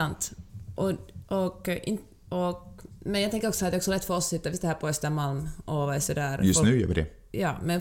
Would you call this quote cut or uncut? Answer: uncut